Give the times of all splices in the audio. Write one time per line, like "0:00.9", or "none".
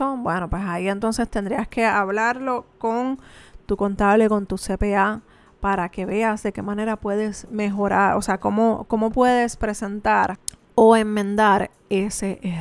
none